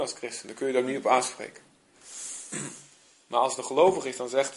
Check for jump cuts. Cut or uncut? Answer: uncut